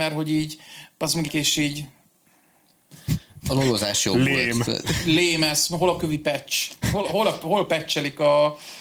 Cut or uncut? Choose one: cut